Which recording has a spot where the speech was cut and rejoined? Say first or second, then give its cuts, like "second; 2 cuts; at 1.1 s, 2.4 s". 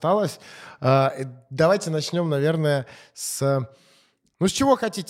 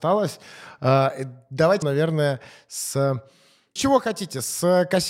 second; 2 cuts; at 1.8 s, 3.8 s